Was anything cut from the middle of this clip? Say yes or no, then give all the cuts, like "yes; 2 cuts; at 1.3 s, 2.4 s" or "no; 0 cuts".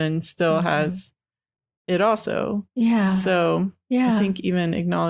no; 0 cuts